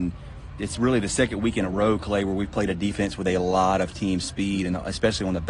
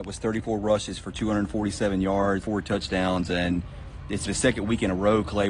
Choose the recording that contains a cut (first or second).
second